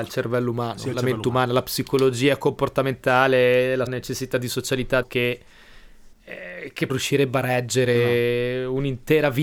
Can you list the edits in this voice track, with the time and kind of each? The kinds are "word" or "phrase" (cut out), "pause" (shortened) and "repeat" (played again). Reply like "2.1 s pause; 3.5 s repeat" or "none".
3.9 s word; 5.0 s word; 6.1 s pause; 6.9 s phrase

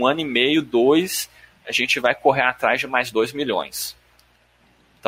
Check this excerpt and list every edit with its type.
none

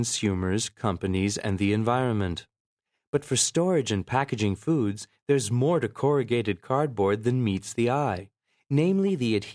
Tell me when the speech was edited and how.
none

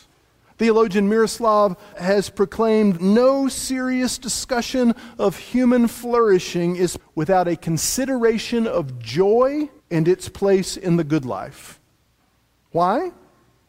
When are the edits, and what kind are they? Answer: 1.9 s word; 3.0 s word; 7.0 s word; 9.8 s pause

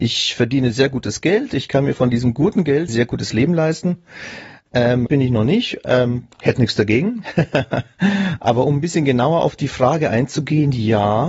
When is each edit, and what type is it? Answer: 2.9 s word; 5.1 s word; 6.3 s pause

